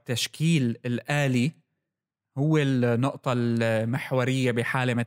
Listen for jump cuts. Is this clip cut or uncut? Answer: uncut